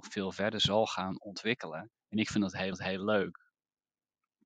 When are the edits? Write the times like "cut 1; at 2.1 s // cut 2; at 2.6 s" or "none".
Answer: cut 1; at 2.0 s // cut 2; at 2.7 s